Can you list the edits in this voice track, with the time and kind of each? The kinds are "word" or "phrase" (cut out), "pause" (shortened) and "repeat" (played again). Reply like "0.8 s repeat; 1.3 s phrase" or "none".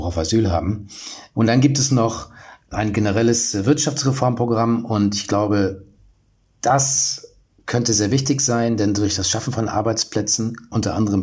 none